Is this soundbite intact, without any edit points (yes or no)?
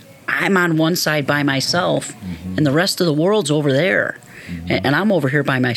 yes